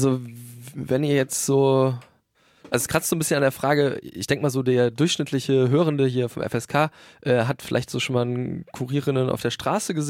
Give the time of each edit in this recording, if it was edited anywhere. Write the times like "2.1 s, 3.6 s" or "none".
none